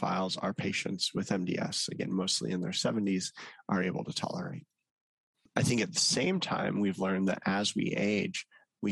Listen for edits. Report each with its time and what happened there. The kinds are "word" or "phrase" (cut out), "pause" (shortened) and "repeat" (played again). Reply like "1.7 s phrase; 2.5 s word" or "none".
none